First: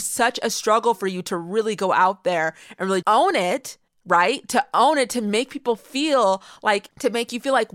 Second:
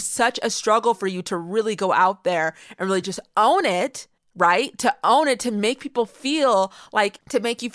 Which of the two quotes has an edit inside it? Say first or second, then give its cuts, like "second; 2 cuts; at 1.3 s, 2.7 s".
first; 1 cut; at 3.0 s